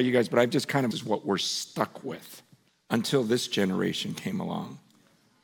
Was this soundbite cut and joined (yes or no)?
yes